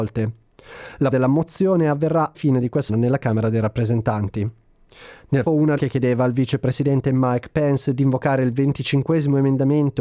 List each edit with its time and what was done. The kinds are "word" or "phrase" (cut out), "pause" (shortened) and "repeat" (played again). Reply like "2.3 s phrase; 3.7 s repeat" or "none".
1.1 s word; 2.3 s word; 2.9 s word; 5.5 s word; 5.8 s word